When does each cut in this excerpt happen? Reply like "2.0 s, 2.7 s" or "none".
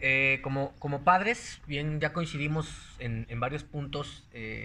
2.0 s